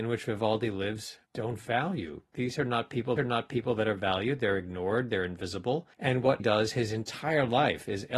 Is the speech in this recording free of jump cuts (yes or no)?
no